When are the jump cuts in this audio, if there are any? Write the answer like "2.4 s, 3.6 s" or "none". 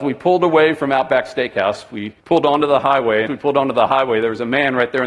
2.2 s, 3.3 s